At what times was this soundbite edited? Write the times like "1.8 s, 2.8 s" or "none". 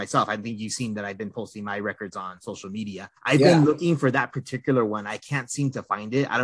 3.2 s